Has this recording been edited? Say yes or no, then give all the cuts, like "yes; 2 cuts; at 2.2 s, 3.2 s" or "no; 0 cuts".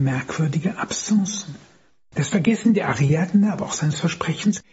no; 0 cuts